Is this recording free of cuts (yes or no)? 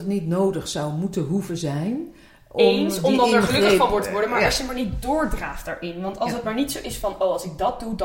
yes